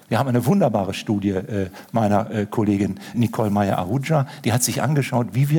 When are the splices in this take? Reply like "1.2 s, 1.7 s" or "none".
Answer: 3.1 s